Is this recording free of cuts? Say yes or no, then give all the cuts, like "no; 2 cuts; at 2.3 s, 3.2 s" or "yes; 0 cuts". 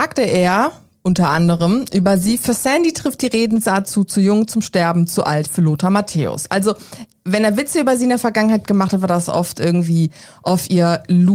yes; 0 cuts